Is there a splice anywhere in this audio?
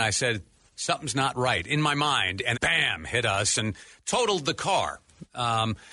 yes; 1 cut; at 2.5 s

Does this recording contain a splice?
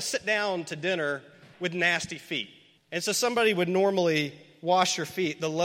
yes; 2 cuts; at 1.5 s, 2.8 s

